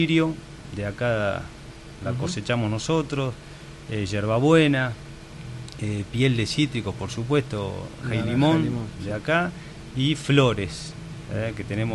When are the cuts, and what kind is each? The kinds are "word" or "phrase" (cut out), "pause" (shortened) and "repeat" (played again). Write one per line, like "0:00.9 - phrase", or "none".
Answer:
0:08.0 - word